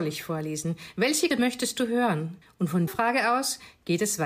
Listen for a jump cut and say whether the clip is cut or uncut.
cut